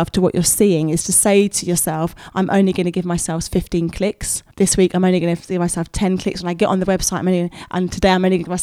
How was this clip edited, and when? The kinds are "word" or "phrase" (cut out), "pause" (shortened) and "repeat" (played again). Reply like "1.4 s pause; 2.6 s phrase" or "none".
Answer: 4.5 s pause